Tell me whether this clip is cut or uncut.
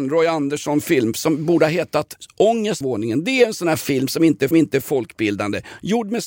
cut